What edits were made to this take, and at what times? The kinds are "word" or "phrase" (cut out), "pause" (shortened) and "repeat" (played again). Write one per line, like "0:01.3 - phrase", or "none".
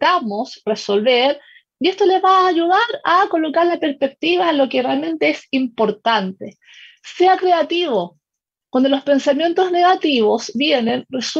none